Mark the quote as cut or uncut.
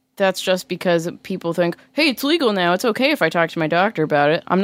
uncut